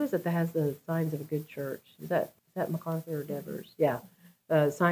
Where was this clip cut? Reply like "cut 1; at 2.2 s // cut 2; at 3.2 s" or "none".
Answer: cut 1; at 2.4 s